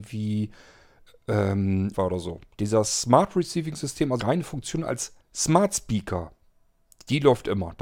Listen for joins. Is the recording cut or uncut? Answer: cut